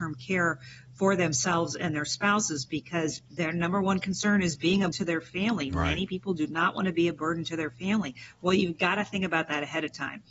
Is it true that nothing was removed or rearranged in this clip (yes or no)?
no